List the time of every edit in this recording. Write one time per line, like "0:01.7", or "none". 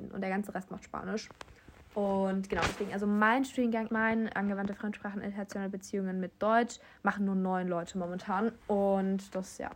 0:03.9
0:08.6